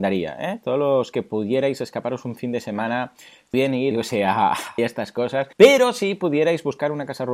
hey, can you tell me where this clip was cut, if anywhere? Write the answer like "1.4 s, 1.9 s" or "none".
3.5 s, 3.9 s, 4.8 s, 5.5 s